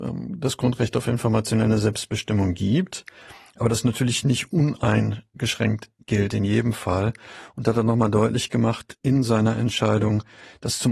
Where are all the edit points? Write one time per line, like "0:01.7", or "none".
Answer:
none